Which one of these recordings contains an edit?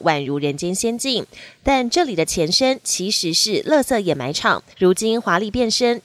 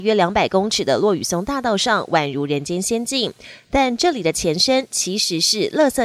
first; 1 cut; at 4.7 s

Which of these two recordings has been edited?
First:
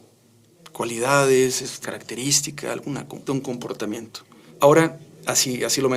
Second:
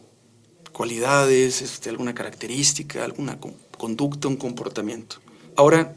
first; 2 cuts; at 1.8 s, 3.3 s

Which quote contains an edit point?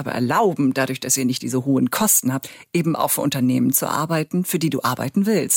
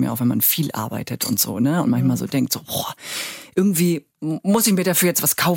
second; 1 cut; at 4.1 s

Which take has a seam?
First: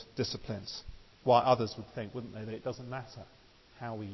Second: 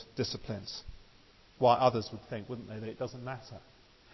first; 1 cut; at 1.1 s

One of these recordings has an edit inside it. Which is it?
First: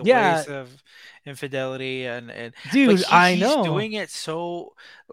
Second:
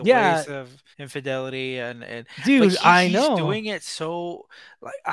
second; 1 cut; at 0.9 s

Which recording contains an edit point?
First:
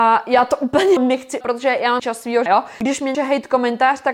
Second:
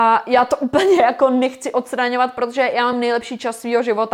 first; 5 cuts; at 1.0 s, 1.4 s, 2.0 s, 2.5 s, 3.1 s

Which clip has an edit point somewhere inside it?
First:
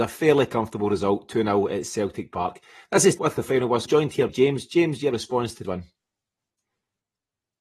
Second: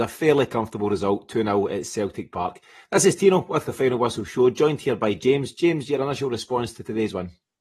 first; 5 cuts; at 3.2 s, 3.9 s, 4.3 s, 5.1 s, 5.6 s

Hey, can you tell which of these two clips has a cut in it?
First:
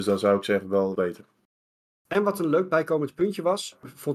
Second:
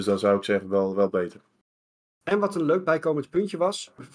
first; 1 cut; at 0.9 s

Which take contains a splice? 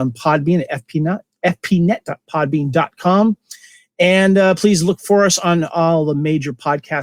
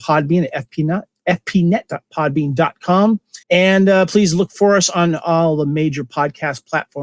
second; 1 cut; at 3.4 s

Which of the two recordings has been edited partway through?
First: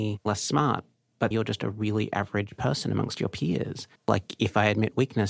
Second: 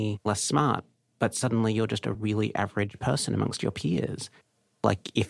first; 2 cuts; at 1.3 s, 4.0 s

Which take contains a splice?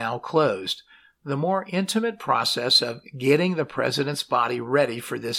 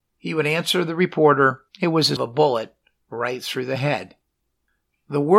second; 2 cuts; at 1.7 s, 2.2 s

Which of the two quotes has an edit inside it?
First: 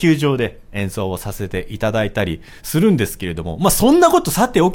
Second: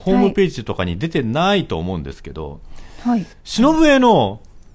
second; 1 cut; at 3.3 s

